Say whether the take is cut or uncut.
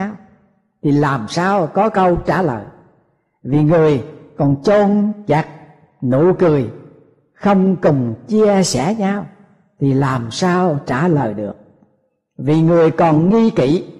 uncut